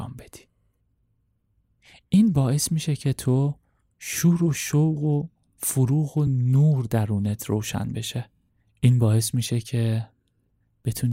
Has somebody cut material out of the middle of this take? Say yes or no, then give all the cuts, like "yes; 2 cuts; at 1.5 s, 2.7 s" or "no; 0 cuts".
no; 0 cuts